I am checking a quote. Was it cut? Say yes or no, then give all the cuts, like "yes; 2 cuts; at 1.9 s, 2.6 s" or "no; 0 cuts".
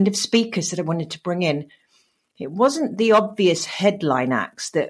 no; 0 cuts